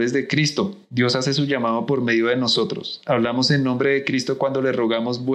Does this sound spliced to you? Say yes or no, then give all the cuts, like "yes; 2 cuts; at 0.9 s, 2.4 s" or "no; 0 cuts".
no; 0 cuts